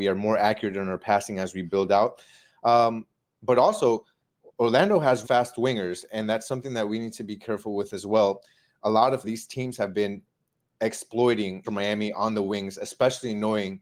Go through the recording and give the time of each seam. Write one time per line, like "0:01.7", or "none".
0:05.2
0:09.2
0:11.6